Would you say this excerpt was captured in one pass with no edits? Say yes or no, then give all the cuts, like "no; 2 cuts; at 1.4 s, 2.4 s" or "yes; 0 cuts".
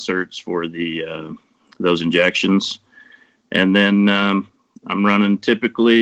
yes; 0 cuts